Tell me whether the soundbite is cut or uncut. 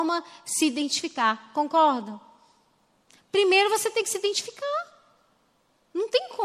uncut